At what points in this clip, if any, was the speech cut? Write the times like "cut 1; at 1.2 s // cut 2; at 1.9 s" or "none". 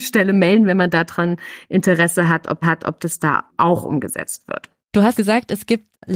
cut 1; at 2.6 s // cut 2; at 3.5 s // cut 3; at 4.8 s // cut 4; at 5.1 s